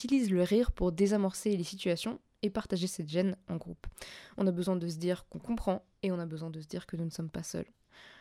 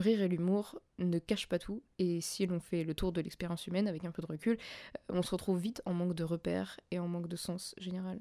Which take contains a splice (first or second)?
second